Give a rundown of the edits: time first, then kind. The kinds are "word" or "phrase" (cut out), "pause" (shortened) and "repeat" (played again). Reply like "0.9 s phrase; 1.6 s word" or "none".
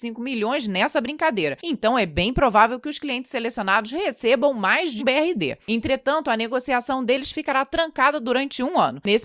5.0 s word